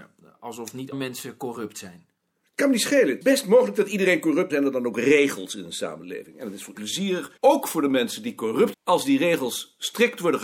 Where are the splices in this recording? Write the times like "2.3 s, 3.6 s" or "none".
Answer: 0.9 s, 3.2 s, 4.5 s, 6.7 s, 7.4 s, 8.7 s